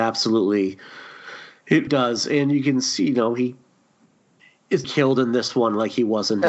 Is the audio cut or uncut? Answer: cut